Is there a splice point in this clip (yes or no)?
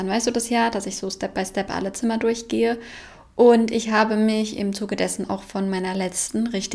no